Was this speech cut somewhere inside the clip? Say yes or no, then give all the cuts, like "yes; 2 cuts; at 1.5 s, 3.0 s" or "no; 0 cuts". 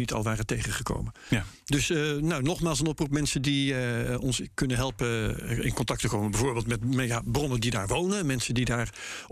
no; 0 cuts